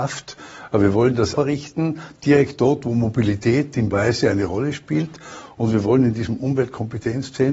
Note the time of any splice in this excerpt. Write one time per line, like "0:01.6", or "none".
0:01.4
0:03.9